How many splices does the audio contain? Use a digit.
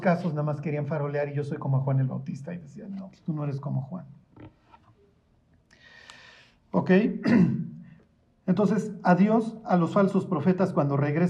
0